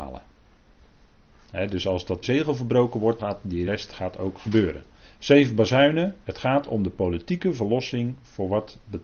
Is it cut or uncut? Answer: cut